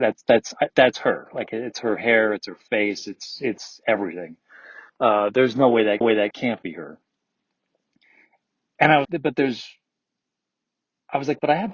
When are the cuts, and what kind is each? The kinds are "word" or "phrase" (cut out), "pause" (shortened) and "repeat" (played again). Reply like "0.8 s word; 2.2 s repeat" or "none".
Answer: 4.9 s pause; 6.0 s repeat; 9.0 s word